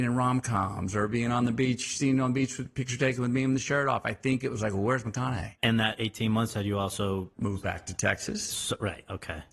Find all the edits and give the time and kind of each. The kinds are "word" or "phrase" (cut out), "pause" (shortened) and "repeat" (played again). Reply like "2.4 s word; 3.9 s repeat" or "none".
7.3 s pause